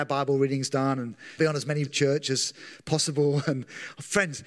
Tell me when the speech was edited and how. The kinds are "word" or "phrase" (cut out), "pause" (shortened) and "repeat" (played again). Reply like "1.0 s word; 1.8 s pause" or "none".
1.4 s phrase; 1.9 s word